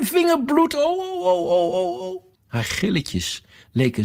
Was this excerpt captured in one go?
no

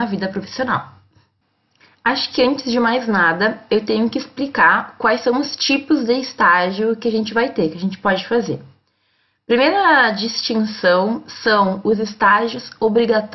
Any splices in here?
no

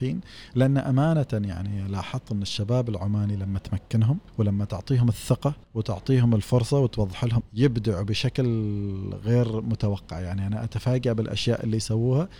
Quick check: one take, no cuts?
no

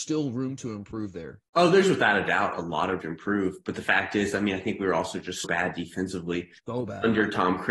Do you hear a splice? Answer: yes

